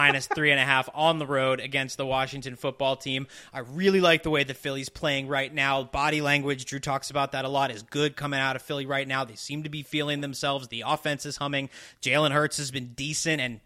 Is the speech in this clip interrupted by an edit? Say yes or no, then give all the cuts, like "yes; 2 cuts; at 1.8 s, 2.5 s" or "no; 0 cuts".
no; 0 cuts